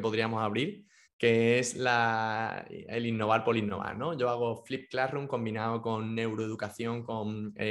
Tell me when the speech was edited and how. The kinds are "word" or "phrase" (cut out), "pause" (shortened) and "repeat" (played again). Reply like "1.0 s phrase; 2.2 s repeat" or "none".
1.0 s pause